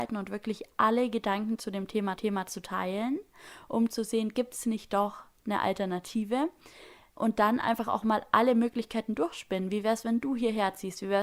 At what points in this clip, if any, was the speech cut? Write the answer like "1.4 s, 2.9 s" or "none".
2.2 s